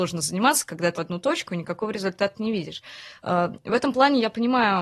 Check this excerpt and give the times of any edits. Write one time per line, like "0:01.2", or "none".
0:01.0